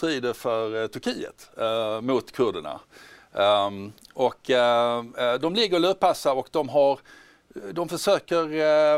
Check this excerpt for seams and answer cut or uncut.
uncut